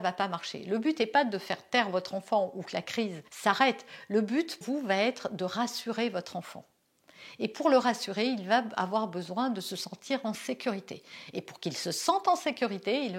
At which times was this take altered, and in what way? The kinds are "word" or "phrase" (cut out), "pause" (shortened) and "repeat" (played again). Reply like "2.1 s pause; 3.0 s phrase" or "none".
3.3 s pause; 4.6 s word